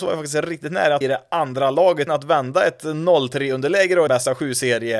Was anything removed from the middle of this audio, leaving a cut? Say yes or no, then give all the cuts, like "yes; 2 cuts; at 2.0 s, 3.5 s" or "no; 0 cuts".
yes; 3 cuts; at 1.0 s, 2.1 s, 4.1 s